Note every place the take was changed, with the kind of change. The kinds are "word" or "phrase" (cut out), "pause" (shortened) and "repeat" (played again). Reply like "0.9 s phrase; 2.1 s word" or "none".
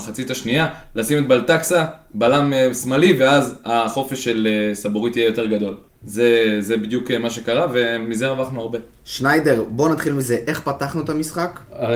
5.9 s pause